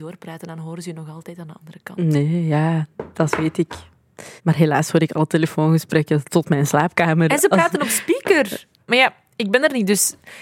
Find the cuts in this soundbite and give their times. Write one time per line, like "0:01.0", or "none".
0:04.4